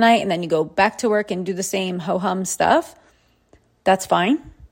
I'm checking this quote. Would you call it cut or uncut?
uncut